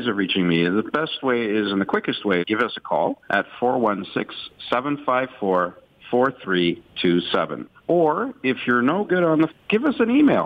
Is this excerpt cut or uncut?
cut